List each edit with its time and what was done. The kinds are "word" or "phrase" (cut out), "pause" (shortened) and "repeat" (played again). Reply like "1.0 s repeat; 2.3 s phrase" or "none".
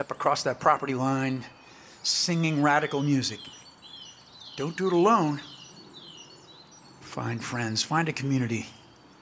none